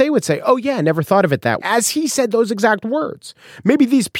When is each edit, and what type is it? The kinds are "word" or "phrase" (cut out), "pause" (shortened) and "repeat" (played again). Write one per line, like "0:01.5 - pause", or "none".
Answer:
0:01.6 - word